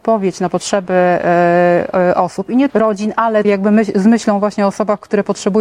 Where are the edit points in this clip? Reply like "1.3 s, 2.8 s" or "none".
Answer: 2.7 s, 3.4 s